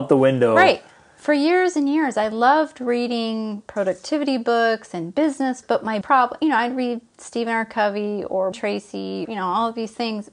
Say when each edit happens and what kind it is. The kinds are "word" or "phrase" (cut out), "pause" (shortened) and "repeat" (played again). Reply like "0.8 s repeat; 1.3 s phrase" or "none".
5.6 s word; 6.0 s word; 8.5 s word; 9.2 s word